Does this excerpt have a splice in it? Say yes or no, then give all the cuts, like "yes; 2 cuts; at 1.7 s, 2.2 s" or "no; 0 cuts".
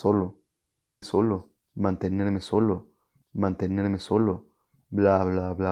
yes; 2 cuts; at 1.0 s, 3.2 s